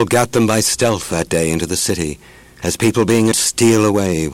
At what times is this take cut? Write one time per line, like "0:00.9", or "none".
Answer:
0:03.3